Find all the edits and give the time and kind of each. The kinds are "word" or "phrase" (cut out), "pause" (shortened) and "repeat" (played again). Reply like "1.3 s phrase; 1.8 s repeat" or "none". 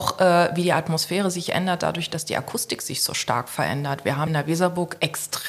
4.3 s word